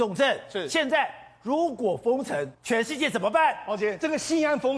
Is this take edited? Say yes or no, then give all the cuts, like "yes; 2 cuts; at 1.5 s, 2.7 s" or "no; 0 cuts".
yes; 1 cut; at 2.5 s